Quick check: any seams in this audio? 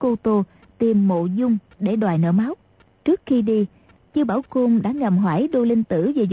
no; 0 cuts

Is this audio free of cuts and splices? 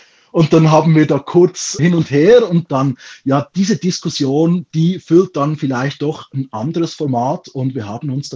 no; 2 cuts; at 1.8 s, 2.7 s

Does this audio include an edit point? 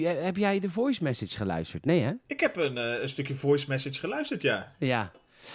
yes; 1 cut; at 2.2 s

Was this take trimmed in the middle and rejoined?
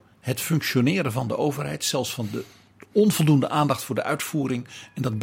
no; 0 cuts

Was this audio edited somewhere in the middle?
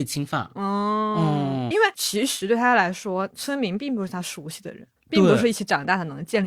yes; 1 cut; at 1.7 s

